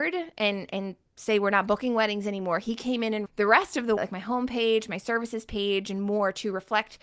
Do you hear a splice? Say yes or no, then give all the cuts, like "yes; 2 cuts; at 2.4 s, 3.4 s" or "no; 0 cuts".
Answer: yes; 2 cuts; at 3.3 s, 4.0 s